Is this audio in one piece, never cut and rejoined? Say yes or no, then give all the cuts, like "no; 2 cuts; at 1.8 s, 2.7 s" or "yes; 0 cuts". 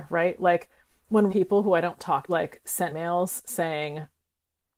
no; 3 cuts; at 1.3 s, 2.3 s, 2.9 s